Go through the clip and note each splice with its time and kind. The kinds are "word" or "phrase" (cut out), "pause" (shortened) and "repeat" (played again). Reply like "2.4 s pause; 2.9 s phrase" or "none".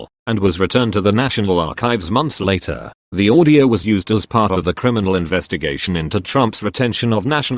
none